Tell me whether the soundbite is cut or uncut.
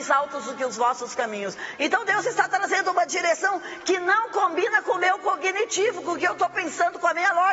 uncut